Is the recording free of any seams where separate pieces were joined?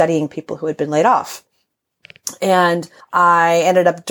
no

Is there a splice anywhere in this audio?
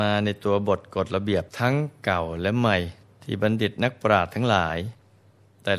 yes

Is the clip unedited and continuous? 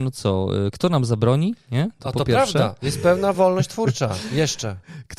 yes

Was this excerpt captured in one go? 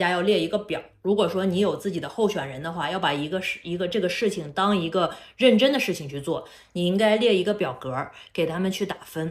yes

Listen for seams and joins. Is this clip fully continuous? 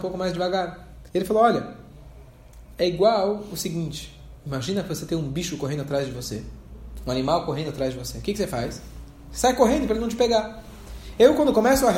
no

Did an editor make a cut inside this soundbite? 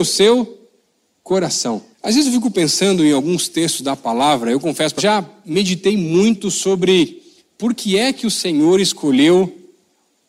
yes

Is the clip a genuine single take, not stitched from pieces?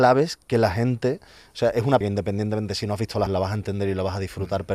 no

